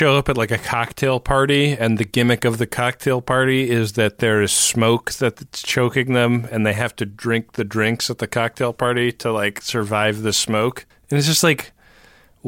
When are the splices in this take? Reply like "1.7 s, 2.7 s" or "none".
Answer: 10.9 s